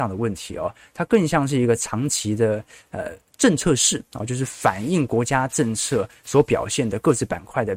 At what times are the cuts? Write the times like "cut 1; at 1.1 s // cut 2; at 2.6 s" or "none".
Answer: none